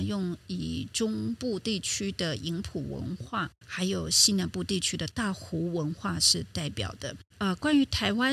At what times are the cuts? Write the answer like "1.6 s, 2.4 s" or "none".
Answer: 7.3 s